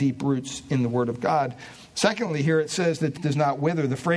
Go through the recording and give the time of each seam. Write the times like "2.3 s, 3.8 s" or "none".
3.2 s